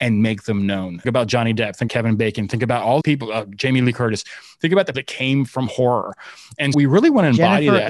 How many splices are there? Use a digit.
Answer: 5